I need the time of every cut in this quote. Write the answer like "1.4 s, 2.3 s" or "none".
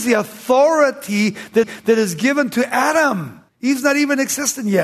1.6 s, 3.5 s